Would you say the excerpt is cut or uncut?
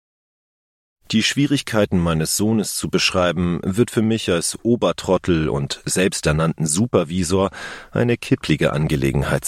uncut